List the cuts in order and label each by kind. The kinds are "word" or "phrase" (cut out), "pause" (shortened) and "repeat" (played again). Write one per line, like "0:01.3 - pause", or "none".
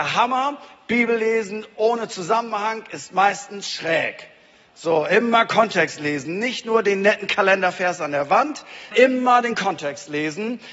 0:08.9 - word